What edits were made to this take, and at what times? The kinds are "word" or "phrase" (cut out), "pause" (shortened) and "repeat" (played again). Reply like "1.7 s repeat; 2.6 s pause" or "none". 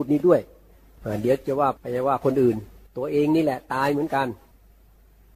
2.9 s pause